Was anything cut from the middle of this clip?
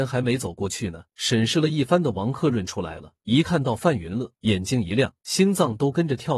yes; 4 cuts; at 1.1 s, 3.2 s, 4.4 s, 5.2 s

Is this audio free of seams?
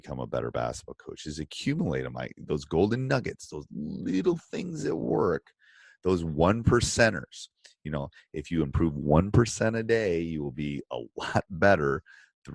yes; 0 cuts

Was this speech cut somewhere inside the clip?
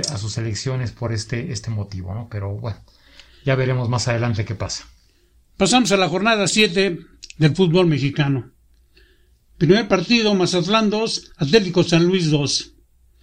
no; 0 cuts

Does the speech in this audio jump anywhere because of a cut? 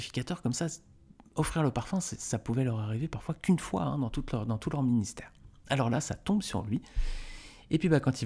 no; 0 cuts

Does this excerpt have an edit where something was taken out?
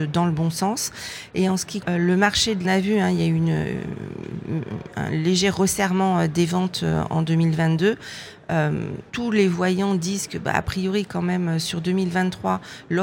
yes; 3 cuts; at 1.8 s, 2.6 s, 9.1 s

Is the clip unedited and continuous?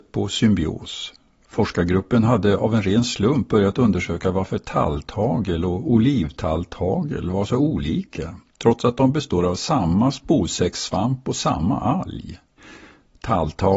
yes; 0 cuts

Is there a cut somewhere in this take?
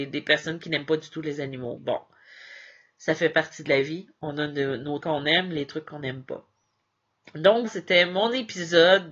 yes; 3 cuts; at 1.8 s, 5.0 s, 7.7 s

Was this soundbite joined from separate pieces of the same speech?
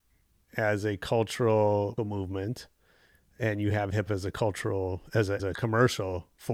yes; 3 cuts; at 2.0 s, 4.1 s, 5.4 s

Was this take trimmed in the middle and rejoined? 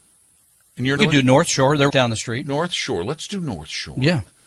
yes; 2 cuts; at 1.0 s, 1.9 s

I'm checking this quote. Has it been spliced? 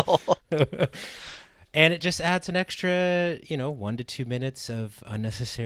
no; 0 cuts

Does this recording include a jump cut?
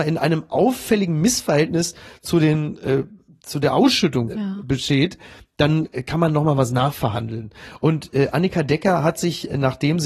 no; 0 cuts

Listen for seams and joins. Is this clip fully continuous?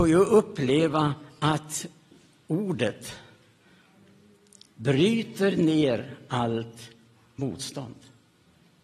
yes; 0 cuts

